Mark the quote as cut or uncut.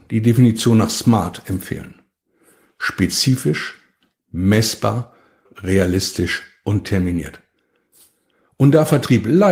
cut